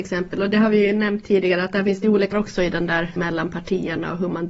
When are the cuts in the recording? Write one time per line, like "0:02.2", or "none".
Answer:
0:02.3
0:03.2

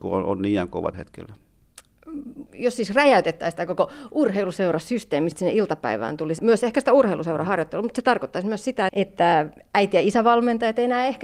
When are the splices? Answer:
0:00.9
0:05.3
0:06.4
0:08.9

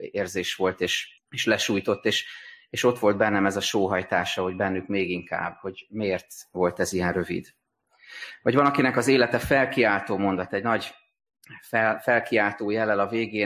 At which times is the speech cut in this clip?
0:01.2

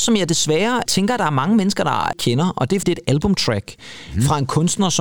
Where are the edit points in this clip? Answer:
0:02.1
0:02.8

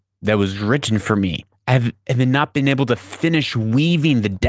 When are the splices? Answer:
none

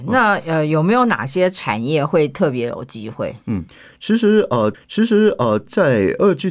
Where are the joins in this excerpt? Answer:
0:03.4
0:04.7

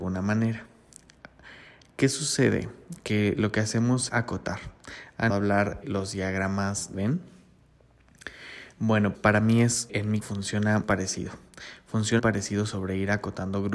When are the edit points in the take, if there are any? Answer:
0:04.1
0:05.3
0:05.8
0:06.9
0:09.1
0:09.9
0:10.2
0:10.8
0:12.2

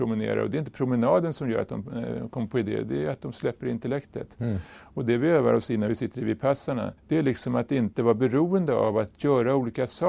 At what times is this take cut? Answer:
0:07.0

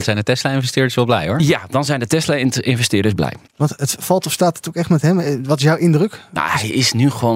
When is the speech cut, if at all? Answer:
0:03.5

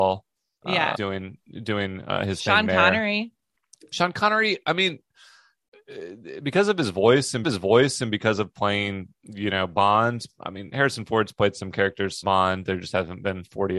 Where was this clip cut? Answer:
0:00.9
0:07.4
0:09.1
0:12.2

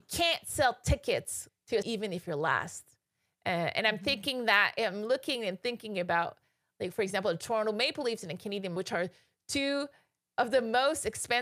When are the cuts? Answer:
0:01.5
0:01.8
0:06.9
0:08.8

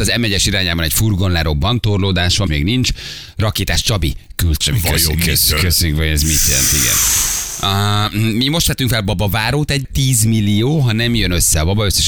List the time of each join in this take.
0:02.5
0:04.6
0:09.8

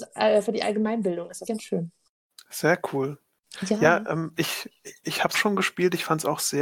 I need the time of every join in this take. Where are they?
0:01.4
0:05.3

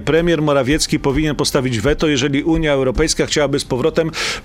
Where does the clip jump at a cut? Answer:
none

